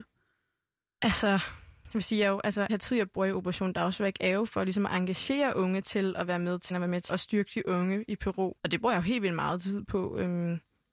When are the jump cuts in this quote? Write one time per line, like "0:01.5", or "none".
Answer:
0:02.7
0:06.7
0:07.1
0:08.6